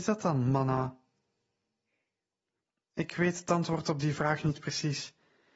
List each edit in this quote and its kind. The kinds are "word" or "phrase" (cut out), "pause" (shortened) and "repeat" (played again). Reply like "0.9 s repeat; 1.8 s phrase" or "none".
none